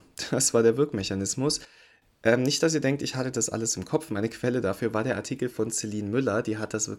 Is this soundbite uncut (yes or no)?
yes